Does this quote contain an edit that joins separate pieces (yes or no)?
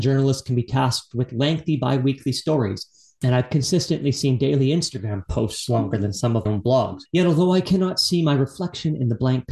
yes